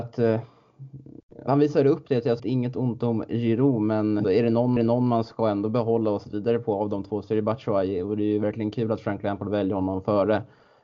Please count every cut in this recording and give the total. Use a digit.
5